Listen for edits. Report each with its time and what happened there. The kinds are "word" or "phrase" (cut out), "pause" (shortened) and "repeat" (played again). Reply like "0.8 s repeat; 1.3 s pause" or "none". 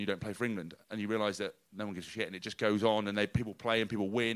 none